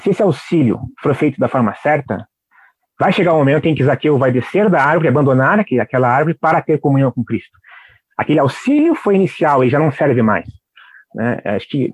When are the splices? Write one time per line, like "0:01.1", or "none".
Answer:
none